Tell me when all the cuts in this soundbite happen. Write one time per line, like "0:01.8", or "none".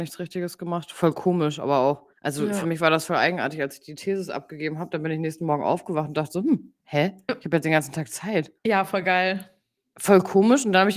0:02.1
0:06.8
0:08.6